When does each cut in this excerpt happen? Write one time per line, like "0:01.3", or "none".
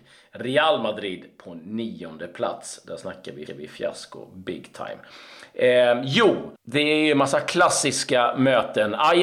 0:03.5
0:06.6